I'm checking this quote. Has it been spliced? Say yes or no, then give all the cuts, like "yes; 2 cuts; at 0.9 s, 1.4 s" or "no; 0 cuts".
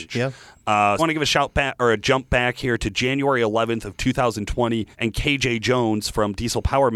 yes; 2 cuts; at 1.0 s, 4.9 s